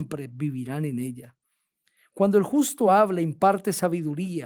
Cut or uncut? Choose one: uncut